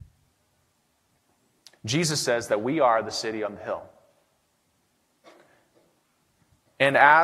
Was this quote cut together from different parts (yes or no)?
no